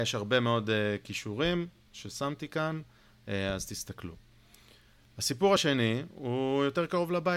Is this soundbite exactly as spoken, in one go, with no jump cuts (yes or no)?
yes